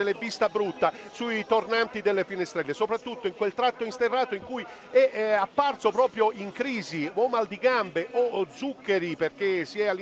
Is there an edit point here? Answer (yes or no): no